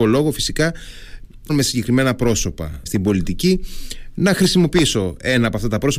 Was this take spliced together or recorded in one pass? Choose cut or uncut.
cut